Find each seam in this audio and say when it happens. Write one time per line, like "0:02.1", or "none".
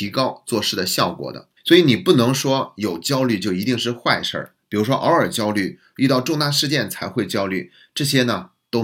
0:01.6